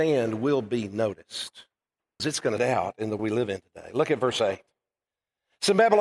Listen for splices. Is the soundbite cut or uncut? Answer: cut